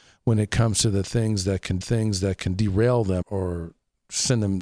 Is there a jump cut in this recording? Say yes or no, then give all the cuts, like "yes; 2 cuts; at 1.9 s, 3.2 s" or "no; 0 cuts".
yes; 2 cuts; at 1.8 s, 3.2 s